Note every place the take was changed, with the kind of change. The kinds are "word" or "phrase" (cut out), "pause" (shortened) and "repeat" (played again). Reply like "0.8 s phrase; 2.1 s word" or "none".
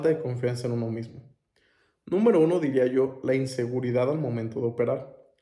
none

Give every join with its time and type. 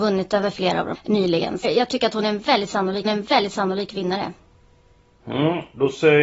0.9 s word; 1.6 s phrase; 3.0 s repeat

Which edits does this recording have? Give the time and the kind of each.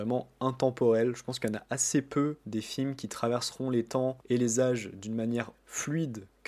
4.2 s pause; 5.5 s word

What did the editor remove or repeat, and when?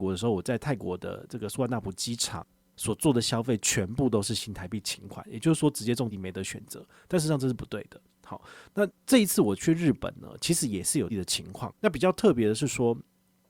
6.1 s word; 9.0 s pause; 11.1 s word; 11.8 s pause

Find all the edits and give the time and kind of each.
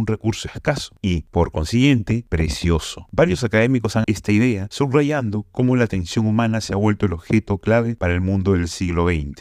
4.0 s word

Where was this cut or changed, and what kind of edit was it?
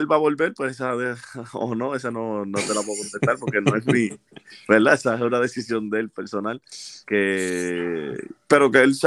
7.0 s pause

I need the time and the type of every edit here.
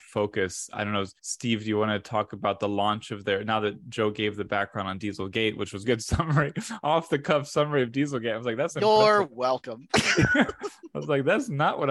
1.2 s pause; 5.8 s word

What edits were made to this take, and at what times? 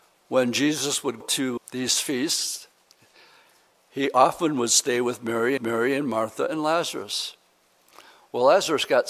1.2 s word; 1.6 s word; 5.6 s repeat

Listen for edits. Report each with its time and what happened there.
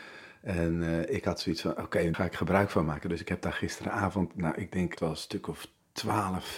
2.1 s word; 5.0 s word

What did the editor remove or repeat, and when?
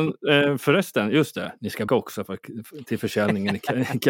1.9 s word

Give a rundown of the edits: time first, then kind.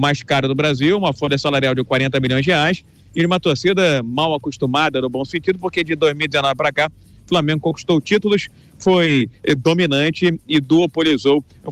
none

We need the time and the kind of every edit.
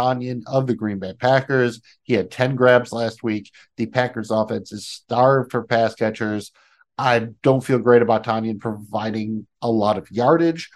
none

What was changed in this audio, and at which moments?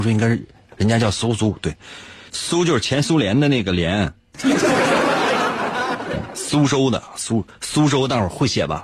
none

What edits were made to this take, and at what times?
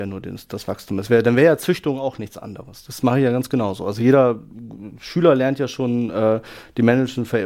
none

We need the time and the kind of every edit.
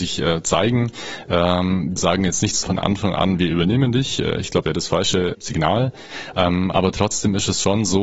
2.0 s word; 2.6 s word; 4.6 s word; 5.3 s word

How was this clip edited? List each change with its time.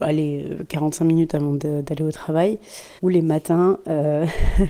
3.0 s pause

